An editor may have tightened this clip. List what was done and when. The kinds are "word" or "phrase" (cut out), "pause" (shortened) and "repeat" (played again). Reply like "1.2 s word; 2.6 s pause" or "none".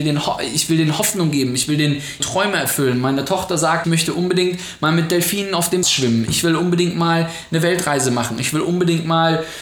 2.2 s word; 3.8 s word; 5.8 s word